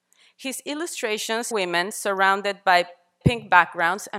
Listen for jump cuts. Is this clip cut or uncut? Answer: cut